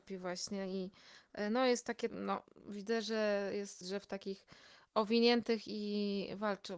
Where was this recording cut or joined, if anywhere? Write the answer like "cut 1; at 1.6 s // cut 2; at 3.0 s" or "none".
cut 1; at 2.1 s // cut 2; at 3.8 s